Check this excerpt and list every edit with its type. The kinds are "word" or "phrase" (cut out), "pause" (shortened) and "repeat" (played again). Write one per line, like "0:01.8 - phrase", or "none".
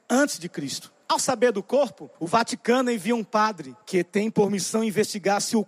0:01.0 - pause
0:02.1 - pause
0:03.8 - pause